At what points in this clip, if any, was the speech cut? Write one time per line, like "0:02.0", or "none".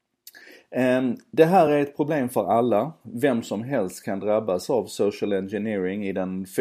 none